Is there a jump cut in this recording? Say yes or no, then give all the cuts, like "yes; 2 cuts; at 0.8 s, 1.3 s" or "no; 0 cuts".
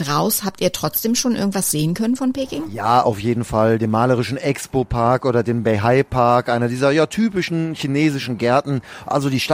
no; 0 cuts